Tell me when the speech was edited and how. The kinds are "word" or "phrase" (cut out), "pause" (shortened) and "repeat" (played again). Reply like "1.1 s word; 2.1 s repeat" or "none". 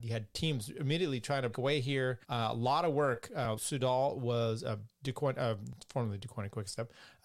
1.5 s word; 2.2 s pause; 3.6 s word